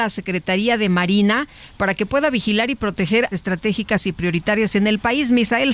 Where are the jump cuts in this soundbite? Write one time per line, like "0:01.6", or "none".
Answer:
0:03.3